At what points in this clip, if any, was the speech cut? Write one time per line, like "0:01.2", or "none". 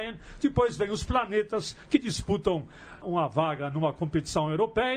0:03.0